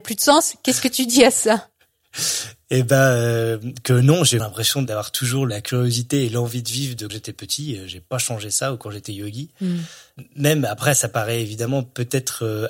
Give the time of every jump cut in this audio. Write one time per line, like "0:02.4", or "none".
0:04.4
0:07.1